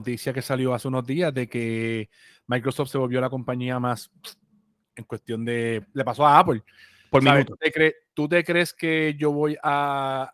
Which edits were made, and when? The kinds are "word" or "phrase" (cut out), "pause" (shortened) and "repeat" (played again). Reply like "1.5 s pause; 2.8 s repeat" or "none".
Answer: 5.8 s word